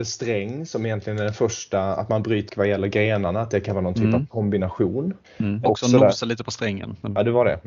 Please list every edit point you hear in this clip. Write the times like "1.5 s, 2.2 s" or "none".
2.5 s, 5.2 s, 5.7 s